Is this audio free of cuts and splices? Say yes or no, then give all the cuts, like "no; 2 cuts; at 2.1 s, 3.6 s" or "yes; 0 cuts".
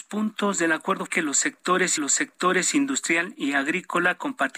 no; 2 cuts; at 1.1 s, 2.0 s